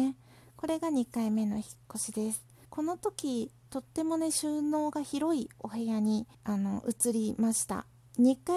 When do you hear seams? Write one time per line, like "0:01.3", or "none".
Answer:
0:02.6
0:06.3